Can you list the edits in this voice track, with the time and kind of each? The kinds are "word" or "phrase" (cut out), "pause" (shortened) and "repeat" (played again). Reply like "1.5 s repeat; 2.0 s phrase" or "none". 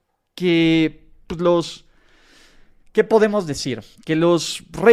none